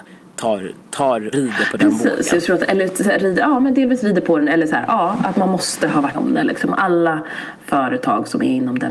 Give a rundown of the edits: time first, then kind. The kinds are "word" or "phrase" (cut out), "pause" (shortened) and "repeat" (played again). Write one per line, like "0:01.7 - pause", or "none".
0:01.3 - word
0:06.1 - word